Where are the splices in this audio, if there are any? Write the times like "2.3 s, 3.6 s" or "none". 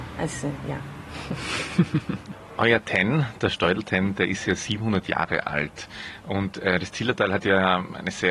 none

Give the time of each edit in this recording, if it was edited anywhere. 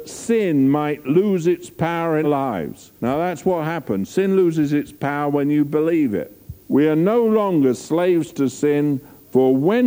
2.2 s, 3.0 s, 6.6 s

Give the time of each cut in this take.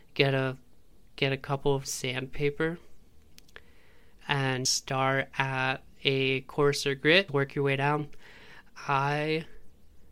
1.8 s, 4.7 s, 7.3 s

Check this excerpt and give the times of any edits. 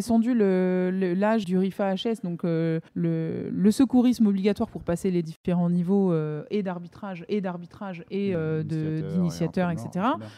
1.4 s, 2.9 s, 7.3 s

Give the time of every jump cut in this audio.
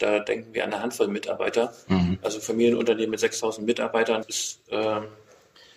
4.2 s

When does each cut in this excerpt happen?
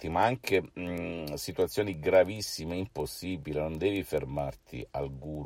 none

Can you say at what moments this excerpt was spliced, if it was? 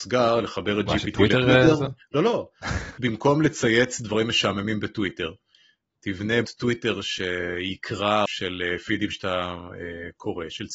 3.0 s, 6.4 s, 8.3 s

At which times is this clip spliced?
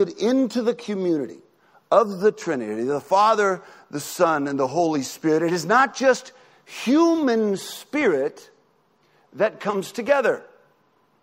none

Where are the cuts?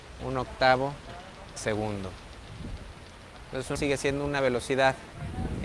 1.6 s, 3.8 s

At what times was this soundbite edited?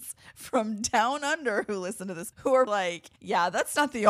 2.3 s, 2.7 s, 3.2 s

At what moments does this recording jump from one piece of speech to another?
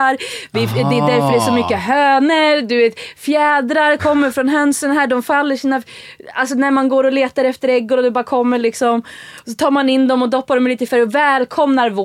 10.9 s

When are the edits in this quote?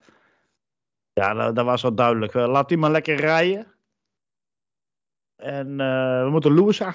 none

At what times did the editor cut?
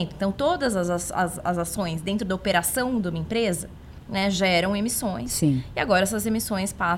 none

